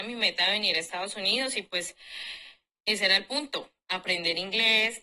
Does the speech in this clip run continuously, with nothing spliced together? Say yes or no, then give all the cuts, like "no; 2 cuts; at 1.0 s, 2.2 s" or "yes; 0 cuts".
yes; 0 cuts